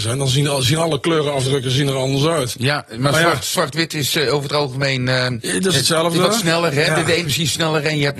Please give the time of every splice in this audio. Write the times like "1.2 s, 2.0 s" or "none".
7.2 s